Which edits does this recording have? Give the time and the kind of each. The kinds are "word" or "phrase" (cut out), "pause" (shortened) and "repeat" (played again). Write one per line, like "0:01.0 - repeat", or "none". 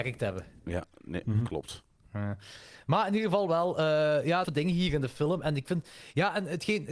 0:04.4 - phrase